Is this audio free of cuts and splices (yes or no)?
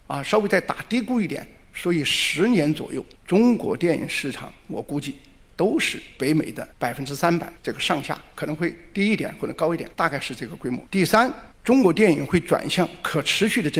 no